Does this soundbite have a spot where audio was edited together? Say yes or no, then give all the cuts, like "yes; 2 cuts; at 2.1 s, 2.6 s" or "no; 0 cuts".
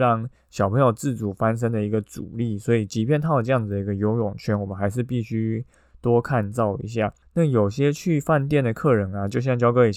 no; 0 cuts